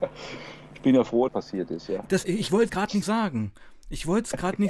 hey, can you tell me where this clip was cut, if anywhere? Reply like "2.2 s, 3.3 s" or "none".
1.3 s, 2.2 s, 2.7 s, 3.0 s

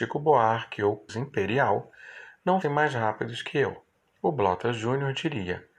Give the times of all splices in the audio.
1.1 s, 2.6 s, 3.9 s

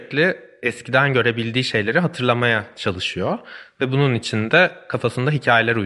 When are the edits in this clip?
none

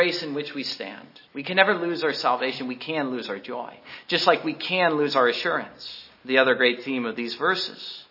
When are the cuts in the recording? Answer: 1.3 s, 6.1 s

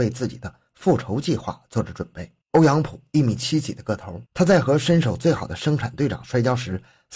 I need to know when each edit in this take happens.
2.4 s, 4.3 s

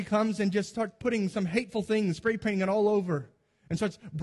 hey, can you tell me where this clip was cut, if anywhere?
none

